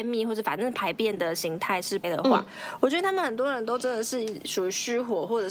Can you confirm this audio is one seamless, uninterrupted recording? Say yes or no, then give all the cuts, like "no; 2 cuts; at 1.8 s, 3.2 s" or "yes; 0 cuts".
no; 1 cut; at 2.0 s